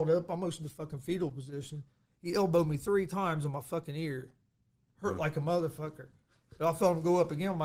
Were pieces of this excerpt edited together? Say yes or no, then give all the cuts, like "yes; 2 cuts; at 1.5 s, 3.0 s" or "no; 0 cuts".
no; 0 cuts